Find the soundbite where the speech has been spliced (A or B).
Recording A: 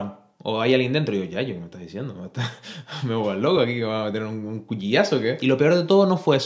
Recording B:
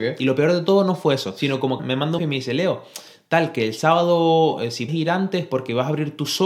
B